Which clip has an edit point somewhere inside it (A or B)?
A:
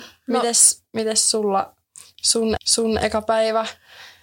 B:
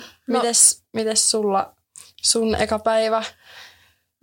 A